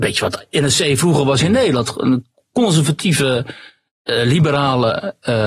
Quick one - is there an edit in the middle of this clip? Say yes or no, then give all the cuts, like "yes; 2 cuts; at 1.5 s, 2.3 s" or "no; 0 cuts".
no; 0 cuts